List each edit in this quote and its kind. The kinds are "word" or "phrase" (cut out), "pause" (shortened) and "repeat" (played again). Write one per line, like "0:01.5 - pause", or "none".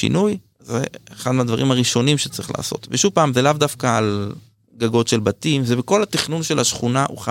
none

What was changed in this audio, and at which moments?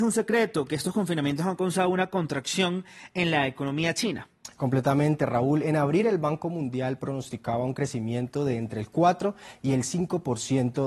none

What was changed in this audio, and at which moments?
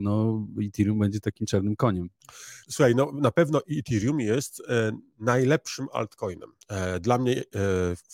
0:02.6 - pause
0:06.6 - pause

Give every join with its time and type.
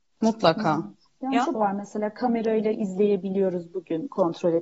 0:01.1 - pause
0:01.5 - phrase

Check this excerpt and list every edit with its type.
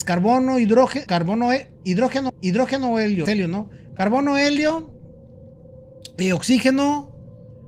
0:01.1 - word
0:02.3 - repeat
0:03.3 - word

